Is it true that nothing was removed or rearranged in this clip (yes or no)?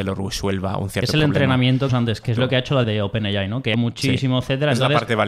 no